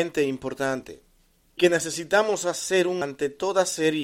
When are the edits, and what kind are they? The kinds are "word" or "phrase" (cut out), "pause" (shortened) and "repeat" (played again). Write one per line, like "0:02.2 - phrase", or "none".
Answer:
0:01.6 - word
0:03.0 - word